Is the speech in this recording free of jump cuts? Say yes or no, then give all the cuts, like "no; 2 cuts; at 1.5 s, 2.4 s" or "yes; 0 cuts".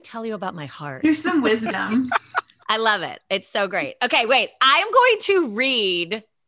yes; 0 cuts